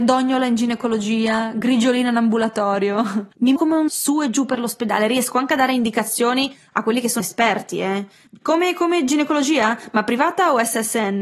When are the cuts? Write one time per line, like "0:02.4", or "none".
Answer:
0:03.6
0:03.9
0:07.2